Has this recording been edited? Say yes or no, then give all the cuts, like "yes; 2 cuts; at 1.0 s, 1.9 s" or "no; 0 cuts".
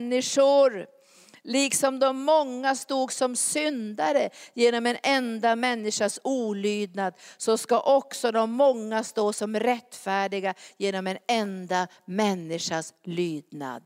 no; 0 cuts